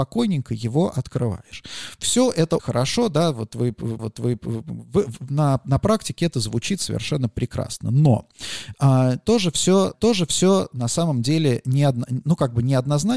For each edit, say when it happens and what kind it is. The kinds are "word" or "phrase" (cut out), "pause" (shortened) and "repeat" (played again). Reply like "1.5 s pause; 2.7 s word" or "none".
2.6 s word; 4.0 s repeat; 9.9 s repeat

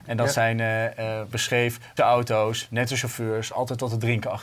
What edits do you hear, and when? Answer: 1.3 s phrase; 2.0 s word

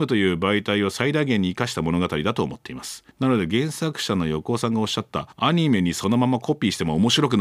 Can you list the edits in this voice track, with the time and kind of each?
3.1 s pause; 5.3 s pause

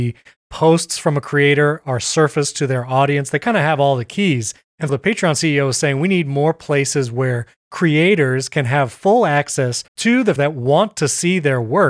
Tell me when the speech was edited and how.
4.9 s word; 9.9 s pause; 10.4 s word

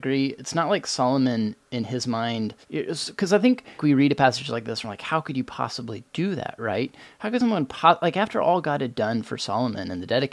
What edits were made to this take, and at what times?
2.6 s pause; 3.8 s word

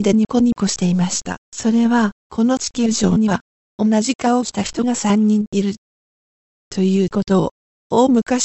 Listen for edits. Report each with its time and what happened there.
1.4 s pause; 2.2 s pause

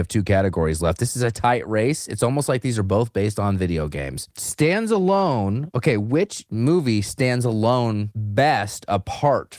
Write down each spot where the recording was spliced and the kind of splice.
none

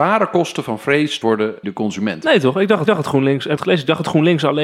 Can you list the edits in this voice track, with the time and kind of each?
1.2 s word; 1.6 s word; 2.9 s repeat; 3.6 s phrase

